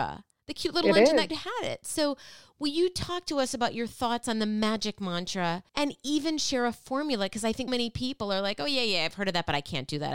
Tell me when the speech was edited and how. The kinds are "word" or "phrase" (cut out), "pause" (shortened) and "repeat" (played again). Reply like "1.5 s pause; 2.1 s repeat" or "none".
1.3 s word; 5.7 s pause; 7.7 s word